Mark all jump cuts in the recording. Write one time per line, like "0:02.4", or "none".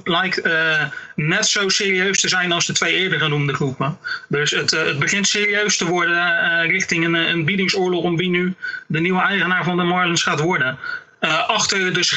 none